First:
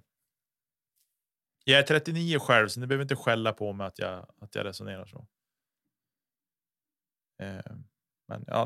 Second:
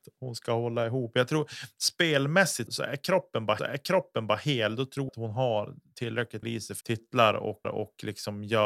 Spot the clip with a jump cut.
second; 6 cuts; at 2.7 s, 3.6 s, 5.1 s, 6.4 s, 6.8 s, 7.6 s

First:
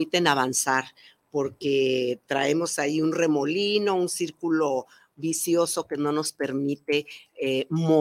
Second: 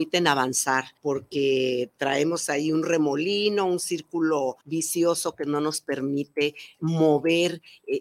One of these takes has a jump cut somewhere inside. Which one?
second; 3 cuts; at 1.0 s, 4.6 s, 6.8 s

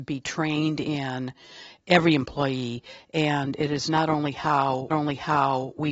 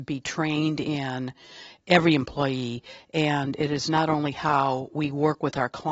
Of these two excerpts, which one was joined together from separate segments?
first; 1 cut; at 4.9 s

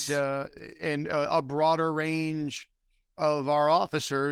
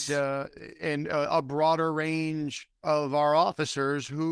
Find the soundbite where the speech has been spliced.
second; 1 cut; at 2.7 s

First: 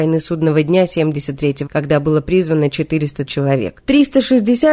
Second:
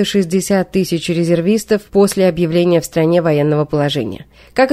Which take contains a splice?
first; 2 cuts; at 1.7 s, 3.3 s

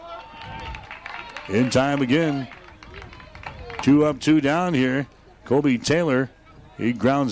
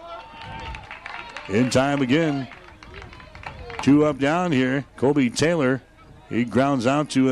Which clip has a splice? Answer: second; 2 cuts; at 4.2 s, 4.9 s

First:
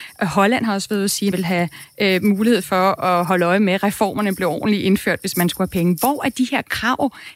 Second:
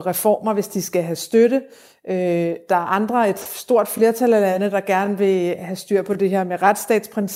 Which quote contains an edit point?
first; 1 cut; at 1.3 s

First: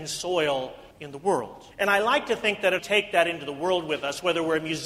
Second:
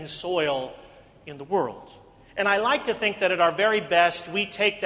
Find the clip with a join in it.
first; 3 cuts; at 0.9 s, 1.7 s, 2.8 s

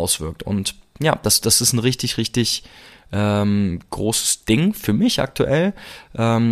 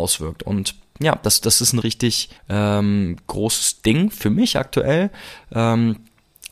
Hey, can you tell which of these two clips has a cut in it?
second; 2 cuts; at 1.8 s, 2.4 s

